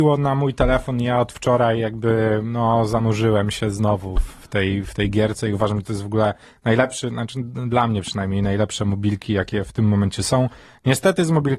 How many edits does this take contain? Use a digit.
0